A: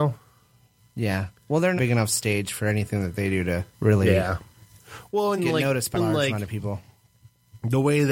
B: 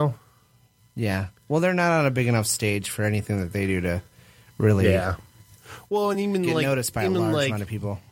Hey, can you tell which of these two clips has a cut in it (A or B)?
A